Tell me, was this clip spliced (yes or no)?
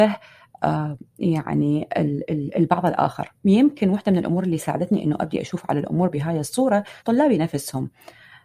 yes